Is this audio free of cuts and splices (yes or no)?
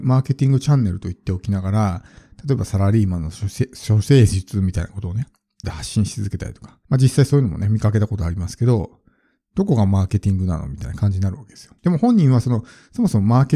no